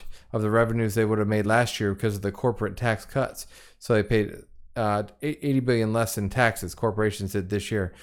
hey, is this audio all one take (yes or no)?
yes